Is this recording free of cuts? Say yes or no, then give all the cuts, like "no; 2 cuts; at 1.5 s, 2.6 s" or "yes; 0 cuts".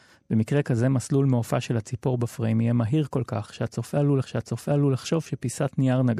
no; 1 cut; at 4.2 s